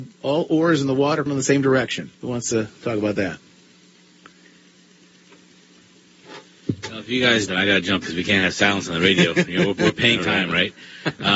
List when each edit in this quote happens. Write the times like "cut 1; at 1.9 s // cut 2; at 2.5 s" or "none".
cut 1; at 1.3 s // cut 2; at 2.1 s // cut 3; at 2.8 s // cut 4; at 7.5 s // cut 5; at 8.0 s // cut 6; at 10.2 s